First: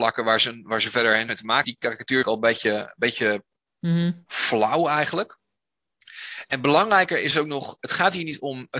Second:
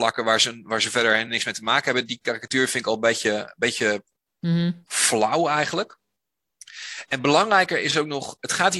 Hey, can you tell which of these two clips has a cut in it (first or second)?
first